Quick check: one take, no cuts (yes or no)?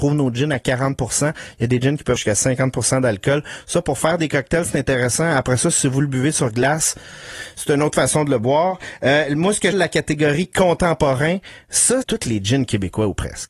no